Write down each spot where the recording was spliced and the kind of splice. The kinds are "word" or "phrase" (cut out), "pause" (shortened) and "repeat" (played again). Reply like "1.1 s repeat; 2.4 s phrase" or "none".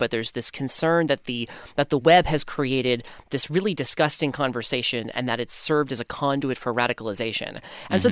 none